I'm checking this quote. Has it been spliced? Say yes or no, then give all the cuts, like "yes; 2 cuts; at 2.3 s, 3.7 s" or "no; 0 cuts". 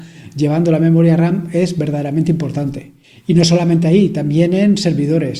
no; 0 cuts